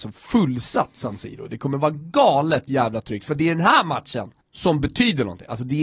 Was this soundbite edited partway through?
no; 0 cuts

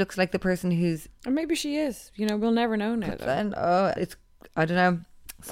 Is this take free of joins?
no; 1 cut; at 4.0 s

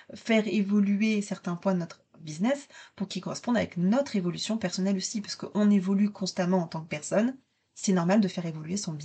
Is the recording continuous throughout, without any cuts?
yes; 0 cuts

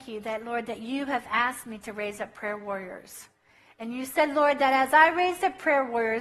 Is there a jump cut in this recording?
no; 0 cuts

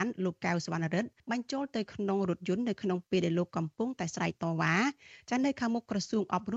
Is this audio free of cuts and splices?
no; 1 cut; at 1.2 s

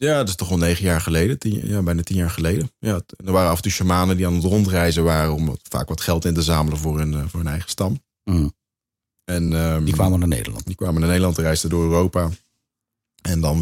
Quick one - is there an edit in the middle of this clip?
no; 0 cuts

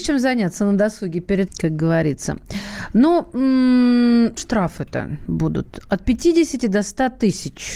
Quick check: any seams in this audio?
yes; 2 cuts; at 1.5 s, 4.4 s

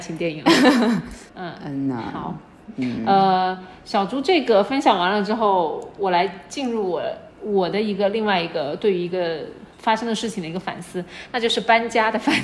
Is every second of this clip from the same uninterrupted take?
no; 3 cuts; at 1.3 s, 7.3 s, 9.7 s

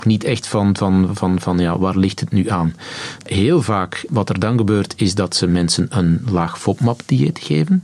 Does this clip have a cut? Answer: no; 0 cuts

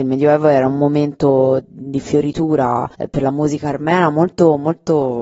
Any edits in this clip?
yes; 1 cut; at 2.9 s

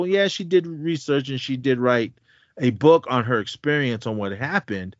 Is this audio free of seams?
yes; 0 cuts

